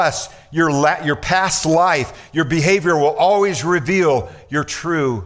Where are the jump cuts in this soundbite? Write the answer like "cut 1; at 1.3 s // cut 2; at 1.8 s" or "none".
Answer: none

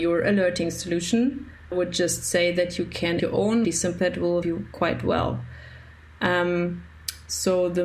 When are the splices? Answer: cut 1; at 1.7 s // cut 2; at 3.2 s // cut 3; at 3.6 s // cut 4; at 4.0 s // cut 5; at 4.4 s

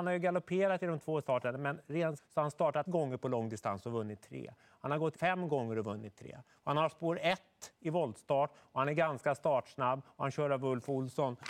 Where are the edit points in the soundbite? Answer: cut 1; at 1.2 s // cut 2; at 2.2 s // cut 3; at 2.9 s // cut 4; at 5.1 s

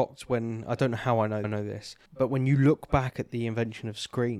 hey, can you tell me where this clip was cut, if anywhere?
cut 1; at 1.4 s // cut 2; at 2.1 s

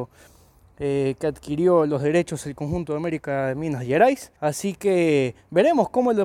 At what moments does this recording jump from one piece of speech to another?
cut 1; at 4.4 s

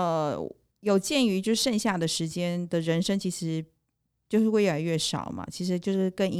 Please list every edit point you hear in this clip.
none

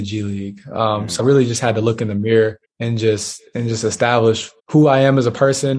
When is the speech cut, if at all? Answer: cut 1; at 1.2 s // cut 2; at 2.6 s // cut 3; at 4.6 s

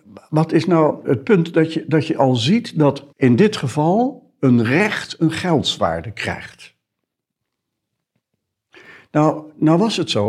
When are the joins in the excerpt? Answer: cut 1; at 1.0 s // cut 2; at 3.1 s

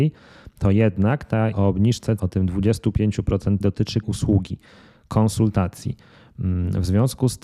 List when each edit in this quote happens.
cut 1; at 1.5 s // cut 2; at 2.2 s // cut 3; at 3.6 s // cut 4; at 4.0 s

